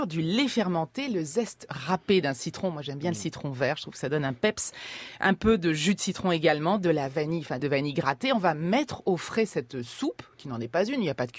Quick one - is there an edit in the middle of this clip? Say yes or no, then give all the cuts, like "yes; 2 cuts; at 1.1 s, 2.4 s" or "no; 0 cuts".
yes; 1 cut; at 7.6 s